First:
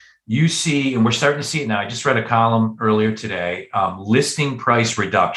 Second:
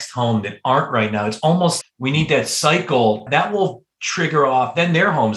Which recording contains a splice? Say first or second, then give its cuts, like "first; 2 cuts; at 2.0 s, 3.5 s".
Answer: second; 2 cuts; at 1.8 s, 3.3 s